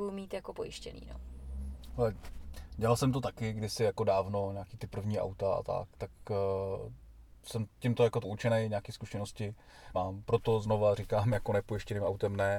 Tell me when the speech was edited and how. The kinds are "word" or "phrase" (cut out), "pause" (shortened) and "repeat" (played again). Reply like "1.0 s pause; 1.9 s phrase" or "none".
5.9 s pause; 8.2 s word; 9.9 s phrase